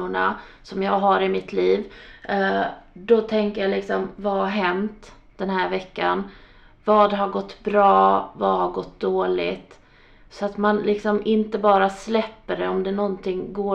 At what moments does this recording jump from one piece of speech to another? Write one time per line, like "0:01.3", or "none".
none